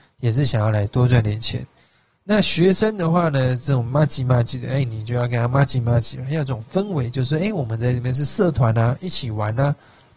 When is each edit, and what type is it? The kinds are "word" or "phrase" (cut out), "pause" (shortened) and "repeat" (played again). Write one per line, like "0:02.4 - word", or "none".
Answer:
none